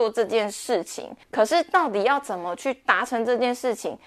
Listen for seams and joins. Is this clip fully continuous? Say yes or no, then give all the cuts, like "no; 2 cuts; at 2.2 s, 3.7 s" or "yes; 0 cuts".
no; 1 cut; at 1.2 s